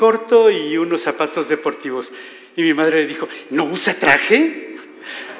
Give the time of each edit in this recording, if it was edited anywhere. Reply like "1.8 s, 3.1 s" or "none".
none